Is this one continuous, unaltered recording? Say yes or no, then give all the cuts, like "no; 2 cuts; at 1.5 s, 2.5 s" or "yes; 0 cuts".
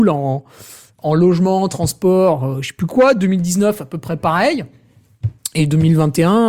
yes; 0 cuts